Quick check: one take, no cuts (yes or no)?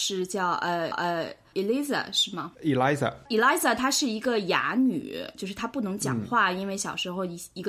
no